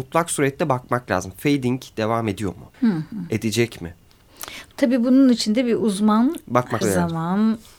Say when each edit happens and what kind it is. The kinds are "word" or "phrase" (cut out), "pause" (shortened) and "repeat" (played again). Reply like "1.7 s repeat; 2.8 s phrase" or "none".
2.7 s pause; 6.8 s word